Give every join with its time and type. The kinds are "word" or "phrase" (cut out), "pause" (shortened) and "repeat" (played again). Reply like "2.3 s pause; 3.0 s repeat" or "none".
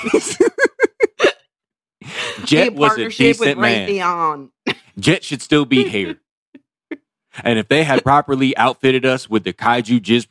none